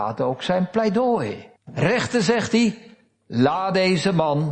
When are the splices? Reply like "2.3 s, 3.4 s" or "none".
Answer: 1.6 s

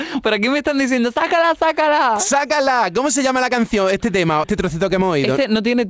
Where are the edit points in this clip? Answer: 4.4 s

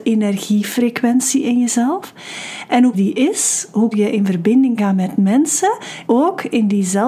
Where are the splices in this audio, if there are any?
2.9 s, 3.9 s, 4.8 s, 6.0 s

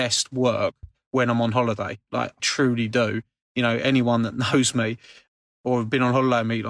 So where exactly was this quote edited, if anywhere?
2.4 s

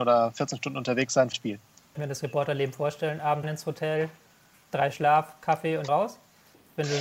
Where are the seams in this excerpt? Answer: 1.3 s, 2.0 s, 3.4 s, 4.9 s, 5.9 s

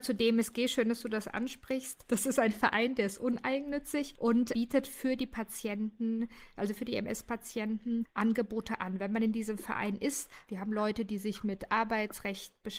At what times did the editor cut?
none

